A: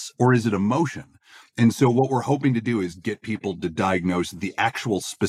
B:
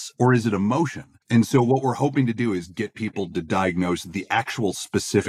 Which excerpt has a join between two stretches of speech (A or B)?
B